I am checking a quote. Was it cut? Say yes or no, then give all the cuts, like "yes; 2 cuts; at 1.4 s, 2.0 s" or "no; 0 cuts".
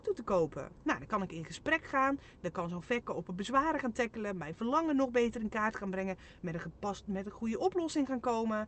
no; 0 cuts